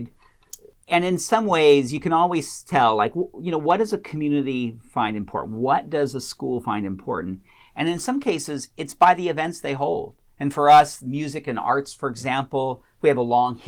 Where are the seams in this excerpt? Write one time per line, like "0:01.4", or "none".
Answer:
none